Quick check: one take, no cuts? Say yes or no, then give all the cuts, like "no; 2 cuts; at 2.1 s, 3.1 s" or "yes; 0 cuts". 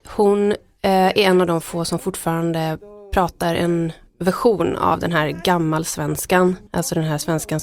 no; 1 cut; at 6.7 s